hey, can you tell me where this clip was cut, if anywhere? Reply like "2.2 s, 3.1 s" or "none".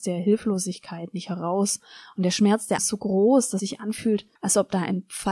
2.8 s, 3.6 s, 4.4 s